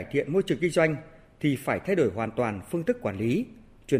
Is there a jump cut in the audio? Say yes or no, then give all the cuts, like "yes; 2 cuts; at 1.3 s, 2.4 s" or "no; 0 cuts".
no; 0 cuts